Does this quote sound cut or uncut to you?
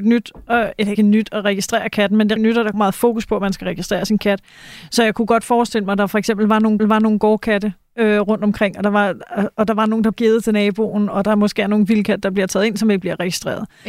cut